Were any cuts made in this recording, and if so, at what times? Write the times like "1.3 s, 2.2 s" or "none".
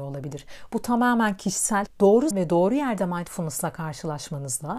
1.9 s, 2.3 s